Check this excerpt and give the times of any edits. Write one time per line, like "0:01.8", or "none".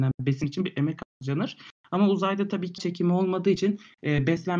0:01.1
0:02.8

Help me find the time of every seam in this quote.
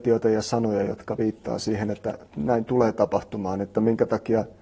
0:02.3

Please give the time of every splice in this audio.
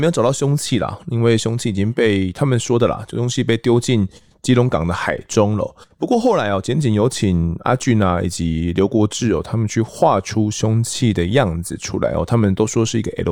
0:05.8

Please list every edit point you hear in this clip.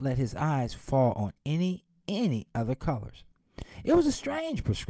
none

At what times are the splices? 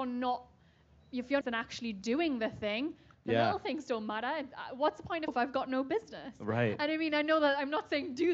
0:01.4
0:05.3

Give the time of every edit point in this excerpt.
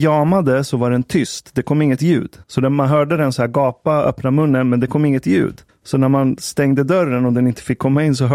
0:02.4
0:05.7

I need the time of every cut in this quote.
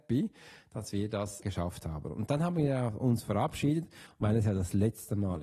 0:01.4

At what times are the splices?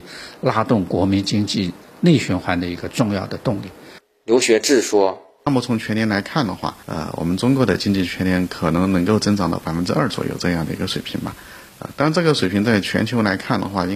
0:06.8

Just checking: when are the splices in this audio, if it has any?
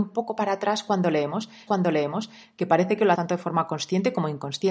0:01.7
0:03.1

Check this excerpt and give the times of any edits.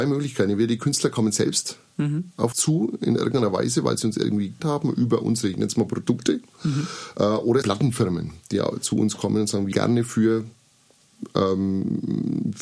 0:02.5
0:04.6
0:07.6
0:09.7

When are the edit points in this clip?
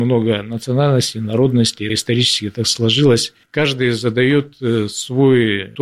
0:01.9
0:03.5

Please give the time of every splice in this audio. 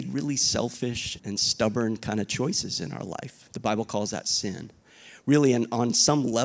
0:01.2

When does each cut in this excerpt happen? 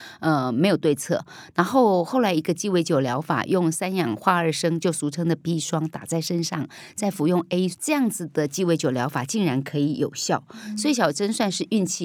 0:07.7

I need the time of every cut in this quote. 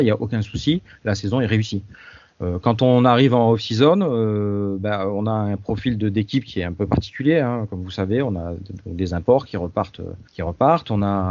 0:10.3

